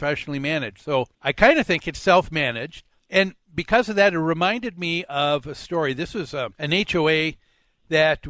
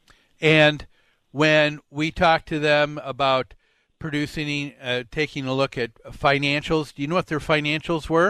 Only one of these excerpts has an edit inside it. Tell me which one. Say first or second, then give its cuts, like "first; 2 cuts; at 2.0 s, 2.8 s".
first; 3 cuts; at 1.1 s, 3.0 s, 6.5 s